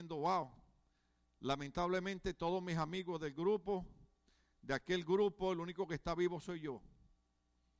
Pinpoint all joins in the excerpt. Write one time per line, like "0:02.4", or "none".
none